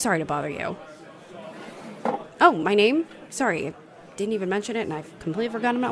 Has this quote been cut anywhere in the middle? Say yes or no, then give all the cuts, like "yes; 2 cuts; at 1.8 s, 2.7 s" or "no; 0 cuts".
no; 0 cuts